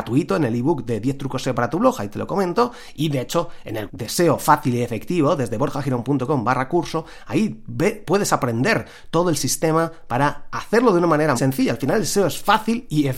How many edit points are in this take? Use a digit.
2